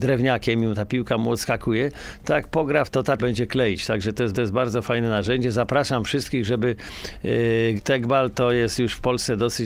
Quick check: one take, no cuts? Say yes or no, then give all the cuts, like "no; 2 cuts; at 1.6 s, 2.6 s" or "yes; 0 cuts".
no; 4 cuts; at 2.9 s, 3.2 s, 4.3 s, 7.8 s